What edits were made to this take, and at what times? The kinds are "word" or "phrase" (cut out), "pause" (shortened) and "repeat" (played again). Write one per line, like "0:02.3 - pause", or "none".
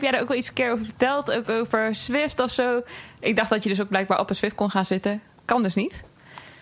none